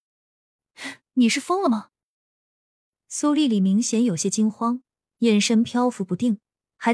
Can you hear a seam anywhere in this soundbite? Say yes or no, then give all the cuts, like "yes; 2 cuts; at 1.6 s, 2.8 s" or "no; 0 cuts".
no; 0 cuts